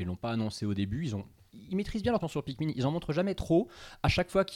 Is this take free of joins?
no; 1 cut; at 2.2 s

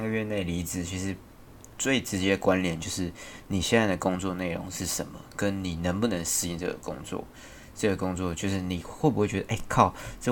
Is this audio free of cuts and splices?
yes; 0 cuts

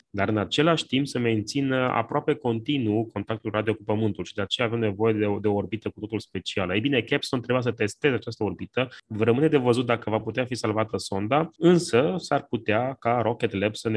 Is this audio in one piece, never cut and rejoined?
yes; 0 cuts

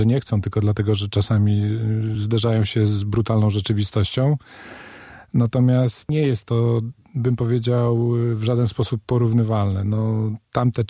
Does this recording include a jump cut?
no; 0 cuts

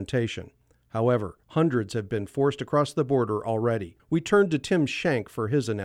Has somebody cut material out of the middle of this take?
yes; 2 cuts; at 1.4 s, 4.0 s

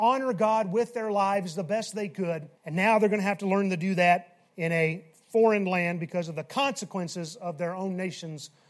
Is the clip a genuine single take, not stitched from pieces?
no; 2 cuts; at 2.6 s, 4.5 s

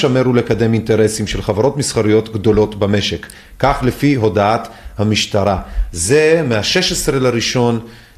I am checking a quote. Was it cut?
no; 0 cuts

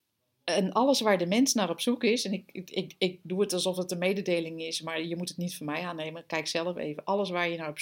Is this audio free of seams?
yes; 0 cuts

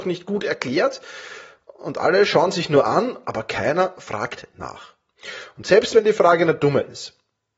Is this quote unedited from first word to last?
yes; 0 cuts

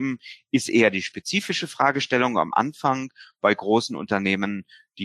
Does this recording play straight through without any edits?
yes; 0 cuts

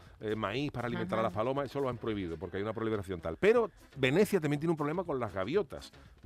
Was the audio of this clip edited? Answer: no; 0 cuts

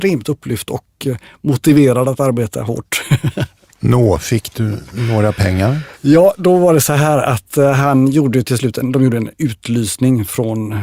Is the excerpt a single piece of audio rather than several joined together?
no; 1 cut; at 3.7 s

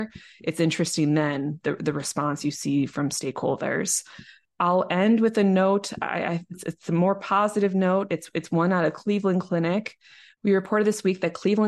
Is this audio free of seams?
yes; 0 cuts

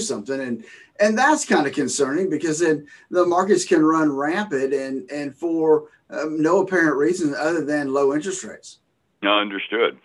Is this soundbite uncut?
yes; 0 cuts

